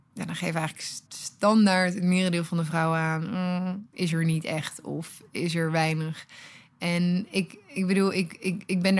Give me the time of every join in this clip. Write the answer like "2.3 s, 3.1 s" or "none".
1.1 s